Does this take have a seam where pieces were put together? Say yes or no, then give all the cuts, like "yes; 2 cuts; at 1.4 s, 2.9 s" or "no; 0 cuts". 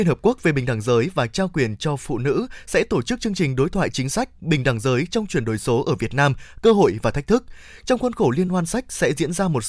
no; 0 cuts